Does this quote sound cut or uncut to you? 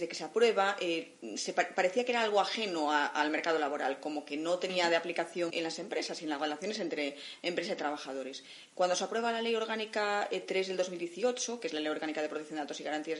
cut